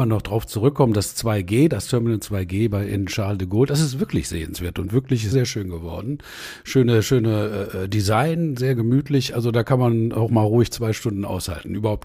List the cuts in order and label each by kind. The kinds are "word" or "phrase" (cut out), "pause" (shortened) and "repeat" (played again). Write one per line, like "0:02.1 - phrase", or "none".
0:05.3 - word